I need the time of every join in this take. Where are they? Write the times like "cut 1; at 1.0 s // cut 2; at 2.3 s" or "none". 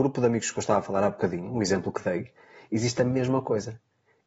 none